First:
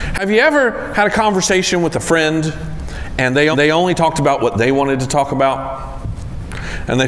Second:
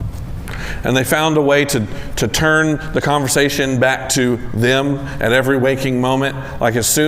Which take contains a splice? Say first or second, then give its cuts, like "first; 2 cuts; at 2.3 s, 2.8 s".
first; 1 cut; at 3.5 s